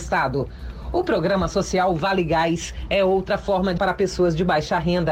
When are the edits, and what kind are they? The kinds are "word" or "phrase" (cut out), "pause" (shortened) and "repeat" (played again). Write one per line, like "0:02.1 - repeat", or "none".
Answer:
0:03.8 - word